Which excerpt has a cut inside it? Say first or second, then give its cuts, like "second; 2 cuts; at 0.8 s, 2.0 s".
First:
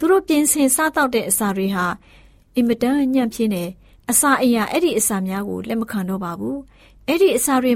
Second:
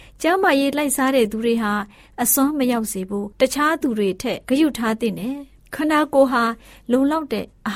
second; 1 cut; at 4.4 s